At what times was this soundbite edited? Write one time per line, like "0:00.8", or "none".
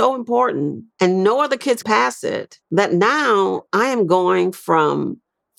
0:00.9
0:01.8
0:02.6
0:03.7